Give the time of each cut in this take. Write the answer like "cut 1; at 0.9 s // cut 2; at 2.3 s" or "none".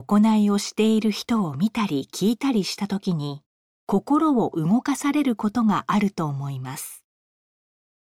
cut 1; at 3.5 s